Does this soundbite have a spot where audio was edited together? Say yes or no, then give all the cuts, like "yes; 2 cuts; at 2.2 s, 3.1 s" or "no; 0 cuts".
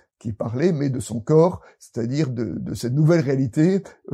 no; 0 cuts